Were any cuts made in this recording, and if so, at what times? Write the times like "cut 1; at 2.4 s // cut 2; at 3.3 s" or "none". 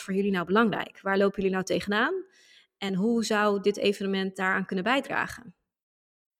none